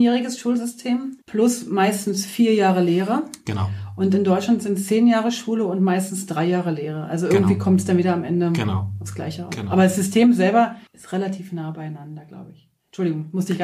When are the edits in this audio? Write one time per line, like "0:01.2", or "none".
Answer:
0:01.2
0:10.9